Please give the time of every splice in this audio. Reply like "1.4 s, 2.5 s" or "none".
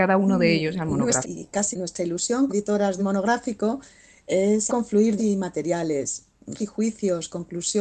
1.2 s, 1.7 s, 2.5 s, 3.0 s, 4.7 s, 5.2 s, 6.6 s